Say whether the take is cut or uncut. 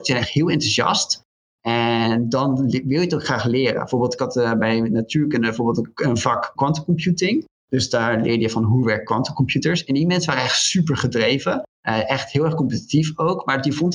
cut